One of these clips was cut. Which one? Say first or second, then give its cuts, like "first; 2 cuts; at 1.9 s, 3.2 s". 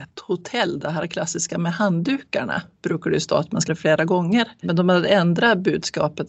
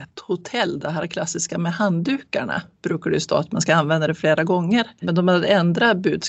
first; 1 cut; at 3.7 s